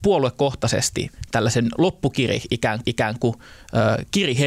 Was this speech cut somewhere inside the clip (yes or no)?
yes